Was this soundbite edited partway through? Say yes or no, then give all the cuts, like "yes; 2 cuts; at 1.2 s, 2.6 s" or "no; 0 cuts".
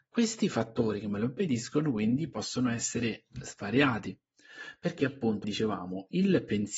yes; 1 cut; at 5.4 s